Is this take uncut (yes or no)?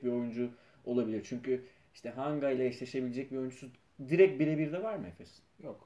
yes